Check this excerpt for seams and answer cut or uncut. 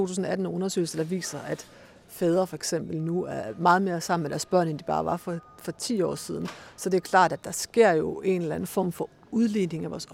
uncut